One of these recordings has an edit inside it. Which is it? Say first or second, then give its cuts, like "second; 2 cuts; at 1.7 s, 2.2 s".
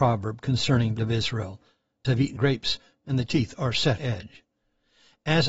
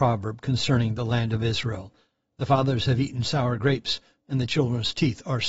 first; 5 cuts; at 1.0 s, 2.0 s, 2.4 s, 3.3 s, 4.0 s